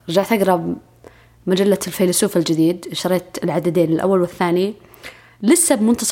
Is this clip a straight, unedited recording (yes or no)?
yes